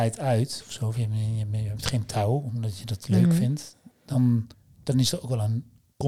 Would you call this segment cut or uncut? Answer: cut